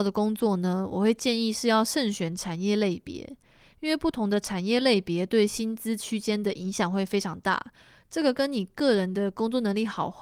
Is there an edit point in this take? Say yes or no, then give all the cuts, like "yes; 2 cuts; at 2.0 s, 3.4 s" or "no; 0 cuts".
no; 0 cuts